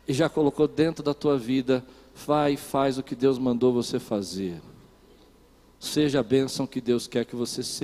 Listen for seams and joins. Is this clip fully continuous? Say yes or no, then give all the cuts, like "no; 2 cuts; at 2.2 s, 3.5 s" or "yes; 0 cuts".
yes; 0 cuts